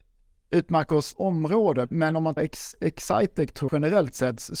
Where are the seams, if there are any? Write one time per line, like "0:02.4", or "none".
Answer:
0:01.1
0:01.9
0:02.4
0:03.7